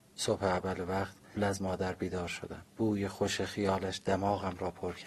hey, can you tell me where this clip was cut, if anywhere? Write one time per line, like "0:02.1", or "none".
0:01.4
0:02.7